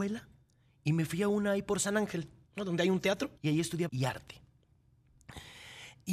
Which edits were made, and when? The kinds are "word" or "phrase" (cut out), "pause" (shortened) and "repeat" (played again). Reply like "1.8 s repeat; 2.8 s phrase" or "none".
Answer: 3.4 s pause; 3.9 s word